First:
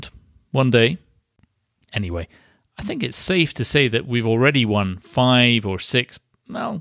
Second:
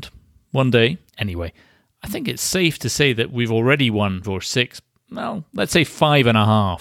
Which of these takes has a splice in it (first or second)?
second